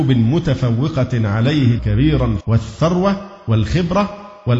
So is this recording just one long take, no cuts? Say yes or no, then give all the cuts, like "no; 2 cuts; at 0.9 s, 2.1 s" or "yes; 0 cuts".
no; 2 cuts; at 1.8 s, 2.4 s